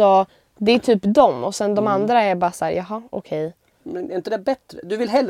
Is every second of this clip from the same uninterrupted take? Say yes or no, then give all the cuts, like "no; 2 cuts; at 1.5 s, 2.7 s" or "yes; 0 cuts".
yes; 0 cuts